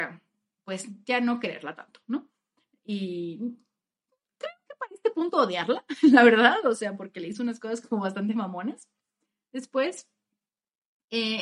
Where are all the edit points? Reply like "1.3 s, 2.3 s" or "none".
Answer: none